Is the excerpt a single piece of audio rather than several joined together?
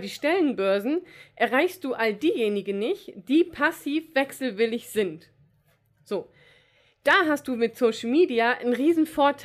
yes; 0 cuts

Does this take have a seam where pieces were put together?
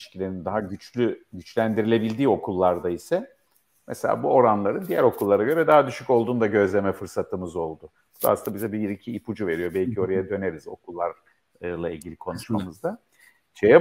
no; 0 cuts

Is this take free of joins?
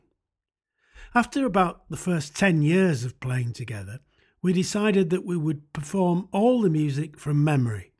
yes; 0 cuts

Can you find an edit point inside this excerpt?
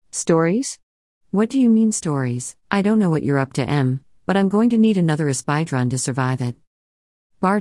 yes; 1 cut; at 2.6 s

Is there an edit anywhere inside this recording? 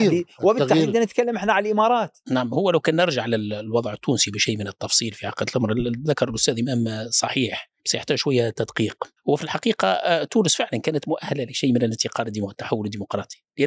yes; 1 cut; at 7.8 s

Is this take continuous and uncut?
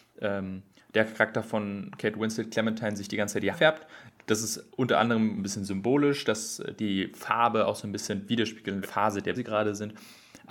no; 5 cuts; at 3.5 s, 4.7 s, 5.4 s, 8.8 s, 9.3 s

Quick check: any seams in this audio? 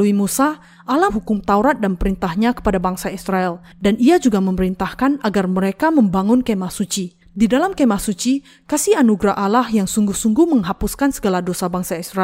yes; 3 cuts; at 1.1 s, 3.7 s, 7.2 s

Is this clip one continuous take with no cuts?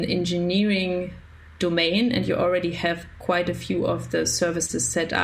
yes; 0 cuts

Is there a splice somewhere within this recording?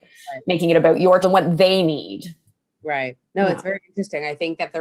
yes; 2 cuts; at 1.2 s, 3.3 s

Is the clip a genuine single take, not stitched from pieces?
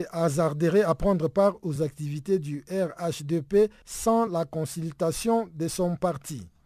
yes; 0 cuts

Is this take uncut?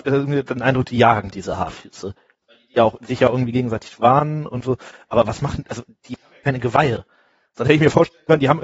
yes; 0 cuts

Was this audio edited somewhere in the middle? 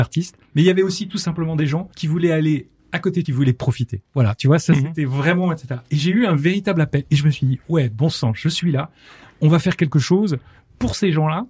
yes; 3 cuts; at 1.9 s, 2.8 s, 3.2 s

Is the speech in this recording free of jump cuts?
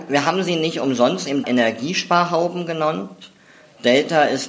no; 1 cut; at 1.4 s

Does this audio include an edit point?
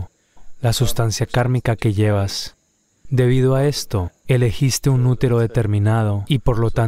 no; 0 cuts

